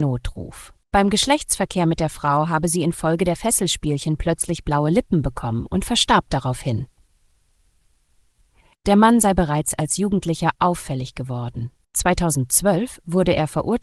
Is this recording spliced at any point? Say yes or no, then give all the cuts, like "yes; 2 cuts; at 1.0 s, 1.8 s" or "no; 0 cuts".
no; 0 cuts